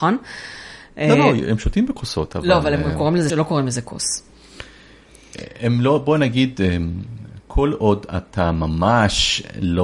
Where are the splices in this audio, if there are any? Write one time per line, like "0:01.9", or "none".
0:03.3